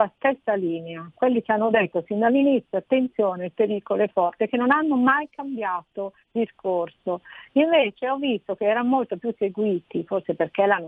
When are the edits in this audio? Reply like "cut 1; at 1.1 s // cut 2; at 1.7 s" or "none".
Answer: cut 1; at 6.2 s